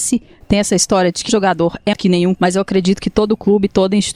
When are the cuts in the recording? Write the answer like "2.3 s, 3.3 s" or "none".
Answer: 1.3 s, 1.9 s, 2.3 s